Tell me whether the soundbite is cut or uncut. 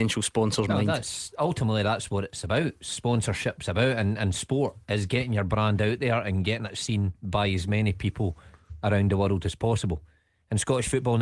uncut